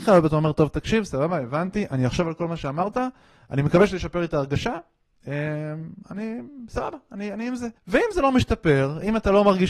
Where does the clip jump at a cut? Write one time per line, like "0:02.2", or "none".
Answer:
0:06.0
0:07.8